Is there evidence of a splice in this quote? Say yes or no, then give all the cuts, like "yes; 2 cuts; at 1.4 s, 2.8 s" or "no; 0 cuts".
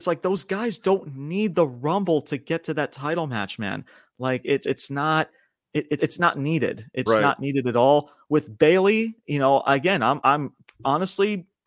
yes; 4 cuts; at 4.6 s, 6.0 s, 7.1 s, 10.2 s